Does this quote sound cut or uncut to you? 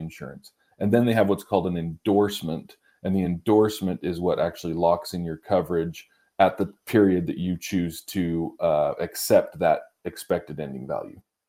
uncut